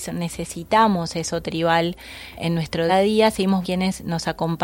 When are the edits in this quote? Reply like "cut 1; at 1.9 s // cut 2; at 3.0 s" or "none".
cut 1; at 2.4 s // cut 2; at 2.9 s // cut 3; at 3.6 s